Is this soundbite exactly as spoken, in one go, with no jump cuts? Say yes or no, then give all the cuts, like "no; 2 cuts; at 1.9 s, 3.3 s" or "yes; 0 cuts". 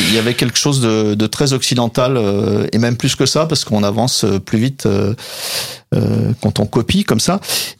yes; 0 cuts